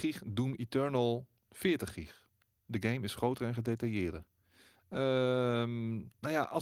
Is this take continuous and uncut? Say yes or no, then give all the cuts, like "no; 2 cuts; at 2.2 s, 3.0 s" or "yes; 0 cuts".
yes; 0 cuts